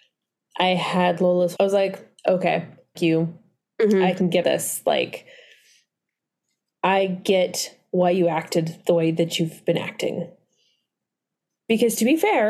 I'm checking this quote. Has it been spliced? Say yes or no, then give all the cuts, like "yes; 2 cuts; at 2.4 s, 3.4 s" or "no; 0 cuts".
yes; 4 cuts; at 1.6 s, 2.2 s, 2.9 s, 4.4 s